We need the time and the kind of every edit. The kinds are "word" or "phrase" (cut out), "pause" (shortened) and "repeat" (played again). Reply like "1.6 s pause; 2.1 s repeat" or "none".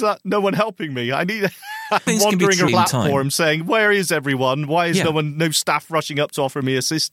2.1 s phrase; 2.7 s phrase